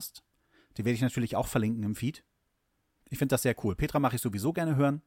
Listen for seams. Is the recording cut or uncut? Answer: uncut